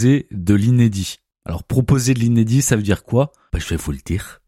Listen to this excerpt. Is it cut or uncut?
uncut